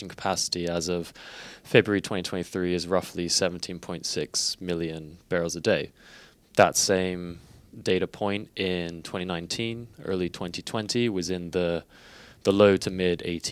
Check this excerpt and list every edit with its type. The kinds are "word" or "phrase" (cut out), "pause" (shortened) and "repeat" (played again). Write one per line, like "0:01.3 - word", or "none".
none